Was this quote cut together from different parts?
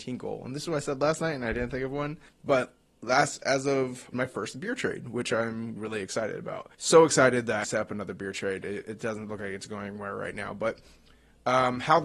yes; 5 cuts; at 2.3 s, 4.1 s, 5.8 s, 6.7 s, 7.6 s

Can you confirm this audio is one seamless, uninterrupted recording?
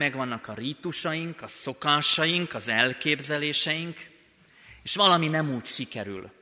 yes; 0 cuts

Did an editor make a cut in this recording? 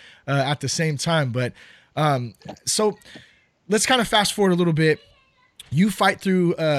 no; 0 cuts

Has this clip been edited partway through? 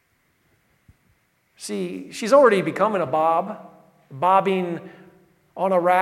no; 0 cuts

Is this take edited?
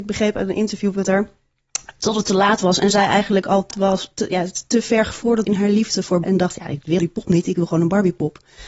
yes; 4 cuts; at 3.7 s, 5.4 s, 6.2 s, 7.0 s

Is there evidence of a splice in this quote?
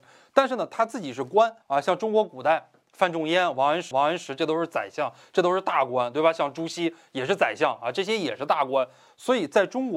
yes; 2 cuts; at 1.6 s, 3.9 s

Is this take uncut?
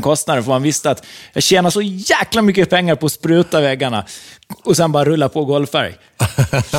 yes; 0 cuts

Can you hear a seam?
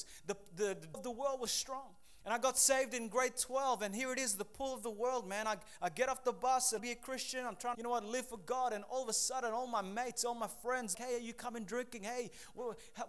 yes; 5 cuts; at 0.9 s, 1.5 s, 6.8 s, 7.7 s, 10.9 s

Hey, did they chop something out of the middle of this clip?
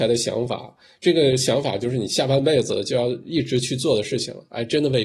no; 0 cuts

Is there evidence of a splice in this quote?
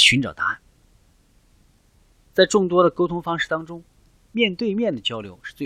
no; 0 cuts

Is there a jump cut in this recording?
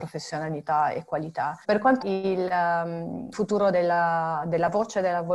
yes; 3 cuts; at 1.6 s, 2.0 s, 3.3 s

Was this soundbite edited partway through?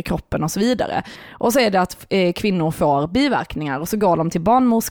no; 0 cuts

